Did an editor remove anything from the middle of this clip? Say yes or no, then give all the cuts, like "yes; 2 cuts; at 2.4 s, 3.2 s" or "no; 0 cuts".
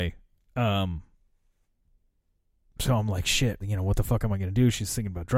yes; 1 cut; at 3.6 s